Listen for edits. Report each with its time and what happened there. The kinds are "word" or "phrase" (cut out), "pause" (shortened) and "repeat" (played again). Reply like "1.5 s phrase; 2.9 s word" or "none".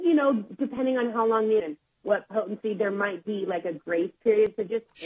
1.6 s phrase